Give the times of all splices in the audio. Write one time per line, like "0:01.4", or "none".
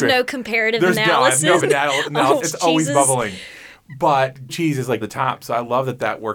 0:01.6
0:02.4
0:04.5
0:05.0